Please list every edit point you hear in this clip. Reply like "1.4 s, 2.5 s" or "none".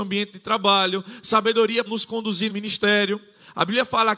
1.9 s, 2.5 s